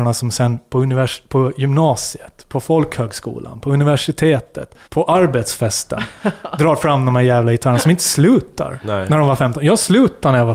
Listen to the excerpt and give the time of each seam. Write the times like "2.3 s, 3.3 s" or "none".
4.8 s